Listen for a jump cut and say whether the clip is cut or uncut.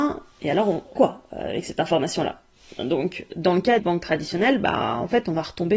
cut